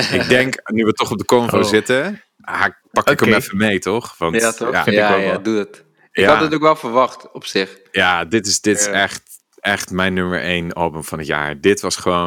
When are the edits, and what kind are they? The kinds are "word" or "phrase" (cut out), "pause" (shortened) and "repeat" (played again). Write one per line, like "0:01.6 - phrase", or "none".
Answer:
none